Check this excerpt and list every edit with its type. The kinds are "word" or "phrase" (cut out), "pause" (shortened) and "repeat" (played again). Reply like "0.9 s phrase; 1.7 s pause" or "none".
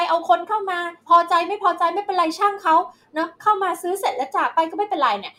1.0 s pause

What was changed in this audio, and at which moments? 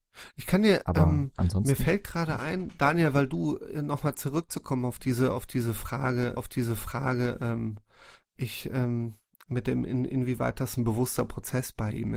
6.4 s repeat

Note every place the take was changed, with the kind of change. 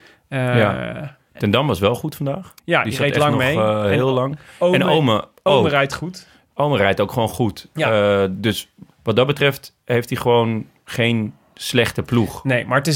2.6 s pause; 8.9 s pause; 9.8 s pause

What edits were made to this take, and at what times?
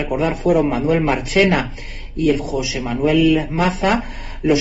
2.4 s word

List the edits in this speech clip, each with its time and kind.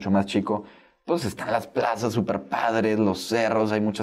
none

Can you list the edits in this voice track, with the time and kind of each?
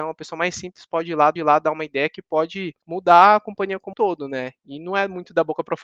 1.4 s repeat; 2.8 s pause; 3.9 s word

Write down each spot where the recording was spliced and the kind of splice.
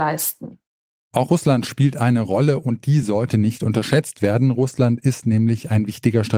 none

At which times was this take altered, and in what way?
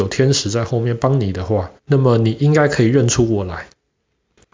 1.8 s pause

